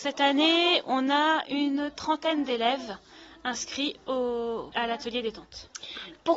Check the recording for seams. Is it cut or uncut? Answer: uncut